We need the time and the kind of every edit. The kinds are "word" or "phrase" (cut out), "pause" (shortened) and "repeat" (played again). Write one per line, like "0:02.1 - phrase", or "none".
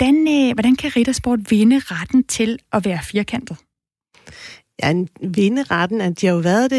none